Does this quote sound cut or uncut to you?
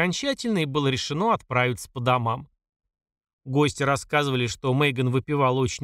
uncut